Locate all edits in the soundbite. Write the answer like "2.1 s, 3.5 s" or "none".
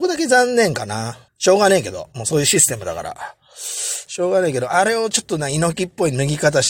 1.3 s